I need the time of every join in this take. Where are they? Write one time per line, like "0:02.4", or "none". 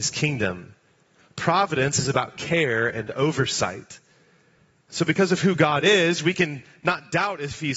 none

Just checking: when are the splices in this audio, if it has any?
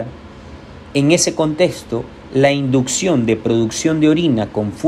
none

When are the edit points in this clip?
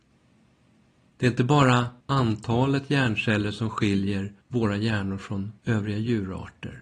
0:02.0
0:04.4
0:05.6

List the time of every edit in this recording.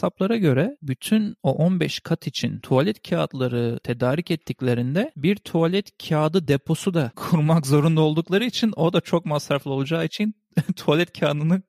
none

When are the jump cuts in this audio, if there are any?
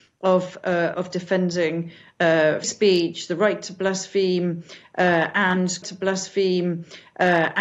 0:00.9
0:02.6
0:05.8

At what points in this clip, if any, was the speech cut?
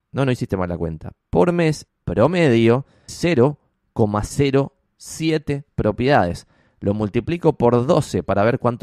0:01.9
0:03.1

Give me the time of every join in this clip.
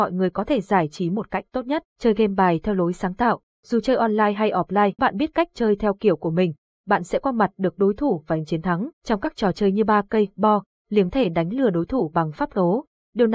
0:01.9
0:05.0
0:08.9
0:11.1
0:12.4

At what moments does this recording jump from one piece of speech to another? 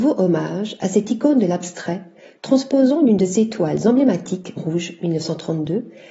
0:04.6

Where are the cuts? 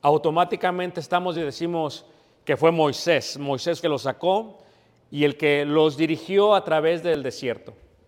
0:01.3
0:03.8

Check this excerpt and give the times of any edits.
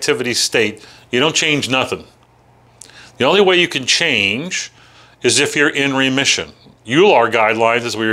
none

